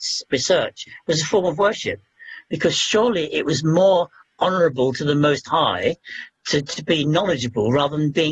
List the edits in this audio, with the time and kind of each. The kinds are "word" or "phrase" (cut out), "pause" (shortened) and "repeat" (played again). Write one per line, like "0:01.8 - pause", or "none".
none